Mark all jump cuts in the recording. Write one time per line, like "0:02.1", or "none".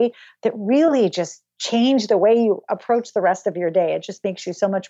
none